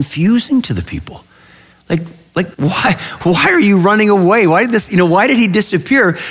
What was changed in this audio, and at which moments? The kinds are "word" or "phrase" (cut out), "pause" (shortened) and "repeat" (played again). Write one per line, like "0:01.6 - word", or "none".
0:02.5 - pause